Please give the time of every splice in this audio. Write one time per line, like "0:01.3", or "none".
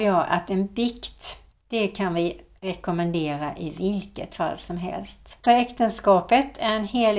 none